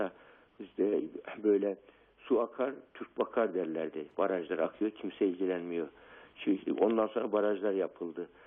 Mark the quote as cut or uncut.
uncut